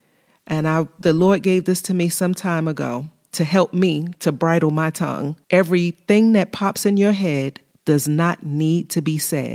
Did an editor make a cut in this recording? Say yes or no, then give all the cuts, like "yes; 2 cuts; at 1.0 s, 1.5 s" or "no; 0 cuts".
yes; 3 cuts; at 1.0 s, 5.4 s, 7.7 s